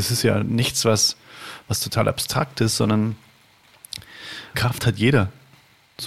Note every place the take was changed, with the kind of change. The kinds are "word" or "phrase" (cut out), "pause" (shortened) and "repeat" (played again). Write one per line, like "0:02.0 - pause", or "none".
0:04.5 - word